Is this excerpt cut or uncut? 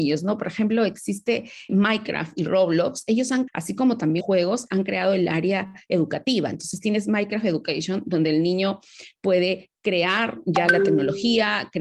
cut